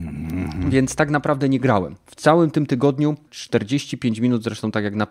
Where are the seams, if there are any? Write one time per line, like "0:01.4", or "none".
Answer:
0:03.3